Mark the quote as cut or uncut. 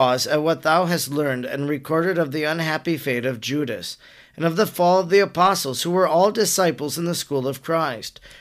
uncut